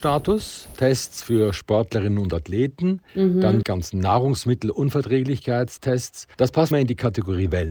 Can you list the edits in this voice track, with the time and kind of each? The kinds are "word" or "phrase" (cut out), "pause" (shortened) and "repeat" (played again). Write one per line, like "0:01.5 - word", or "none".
0:03.1 - pause
0:03.6 - word
0:06.3 - pause
0:06.7 - phrase